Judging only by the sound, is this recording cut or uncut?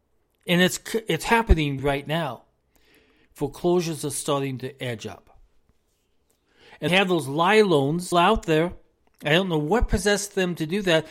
cut